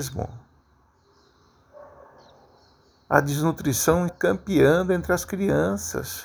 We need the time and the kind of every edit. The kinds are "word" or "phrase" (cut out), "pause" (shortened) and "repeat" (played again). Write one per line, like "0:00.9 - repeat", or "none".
0:04.1 - word